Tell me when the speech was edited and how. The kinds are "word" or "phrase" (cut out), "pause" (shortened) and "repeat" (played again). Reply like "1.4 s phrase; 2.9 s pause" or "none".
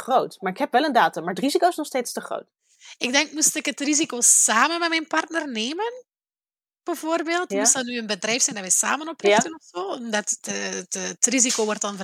none